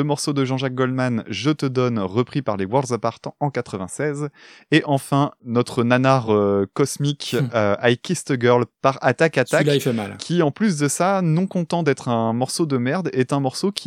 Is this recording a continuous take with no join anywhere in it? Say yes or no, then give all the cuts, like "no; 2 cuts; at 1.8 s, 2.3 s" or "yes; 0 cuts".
yes; 0 cuts